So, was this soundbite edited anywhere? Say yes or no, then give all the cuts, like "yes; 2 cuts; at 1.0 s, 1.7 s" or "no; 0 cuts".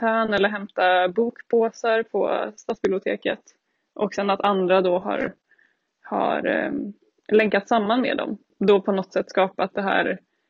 no; 0 cuts